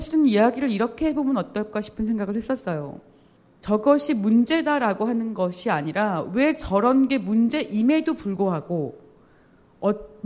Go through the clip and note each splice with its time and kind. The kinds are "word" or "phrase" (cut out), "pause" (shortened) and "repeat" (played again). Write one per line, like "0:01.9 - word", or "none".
0:03.4 - pause